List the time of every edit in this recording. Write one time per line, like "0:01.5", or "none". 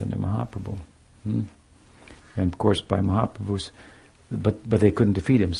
none